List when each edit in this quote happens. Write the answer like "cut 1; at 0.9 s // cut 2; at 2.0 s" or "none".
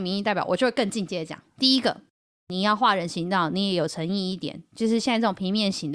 cut 1; at 1.5 s